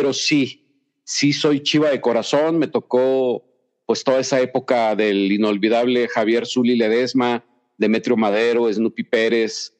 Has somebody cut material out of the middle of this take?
no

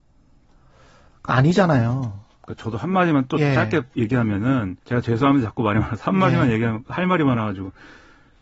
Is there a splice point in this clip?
yes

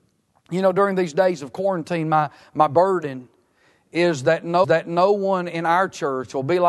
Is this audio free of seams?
no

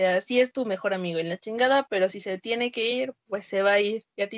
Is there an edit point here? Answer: no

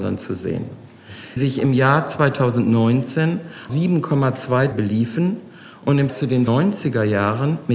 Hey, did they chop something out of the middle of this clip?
yes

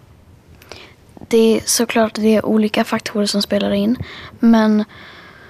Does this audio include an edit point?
no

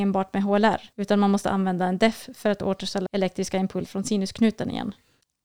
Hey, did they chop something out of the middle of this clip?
yes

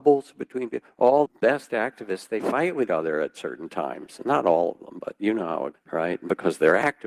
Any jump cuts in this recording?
yes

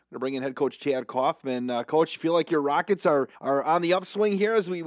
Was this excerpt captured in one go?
no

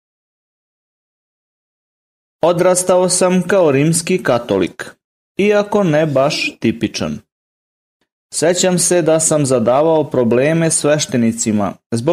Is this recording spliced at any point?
no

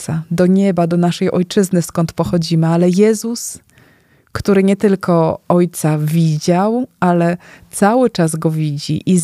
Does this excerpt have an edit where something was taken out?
no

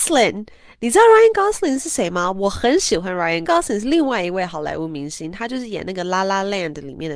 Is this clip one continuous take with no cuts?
no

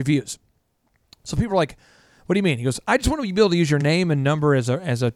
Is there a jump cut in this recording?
no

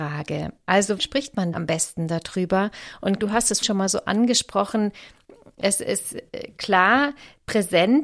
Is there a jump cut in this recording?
yes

